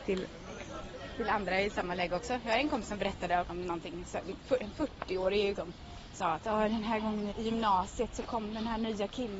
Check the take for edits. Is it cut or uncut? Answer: cut